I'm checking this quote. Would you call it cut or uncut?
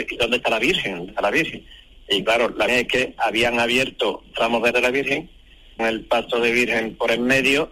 cut